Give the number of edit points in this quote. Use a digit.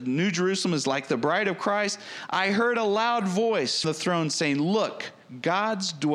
1